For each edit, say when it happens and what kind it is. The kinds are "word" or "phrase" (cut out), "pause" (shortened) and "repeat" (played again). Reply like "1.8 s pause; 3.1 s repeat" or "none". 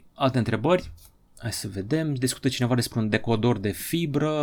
none